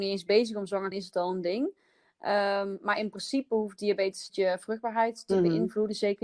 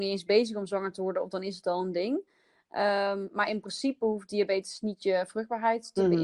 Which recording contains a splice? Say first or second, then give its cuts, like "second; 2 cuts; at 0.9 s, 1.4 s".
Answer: first; 2 cuts; at 0.9 s, 4.3 s